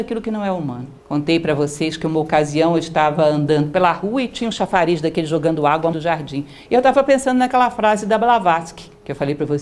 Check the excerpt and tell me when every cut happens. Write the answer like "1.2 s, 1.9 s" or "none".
1.0 s, 5.9 s

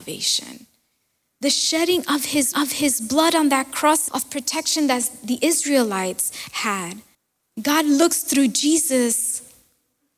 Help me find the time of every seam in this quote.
2.5 s, 4.1 s, 7.1 s

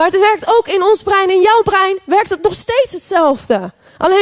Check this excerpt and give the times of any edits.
none

